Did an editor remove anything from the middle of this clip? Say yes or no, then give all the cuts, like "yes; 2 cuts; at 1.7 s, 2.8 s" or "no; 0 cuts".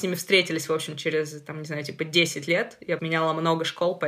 yes; 1 cut; at 3.0 s